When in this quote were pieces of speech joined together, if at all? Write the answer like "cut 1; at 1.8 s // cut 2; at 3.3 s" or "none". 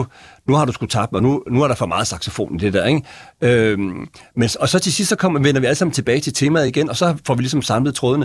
none